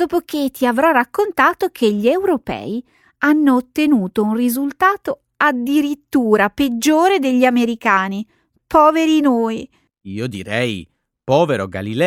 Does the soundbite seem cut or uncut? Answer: uncut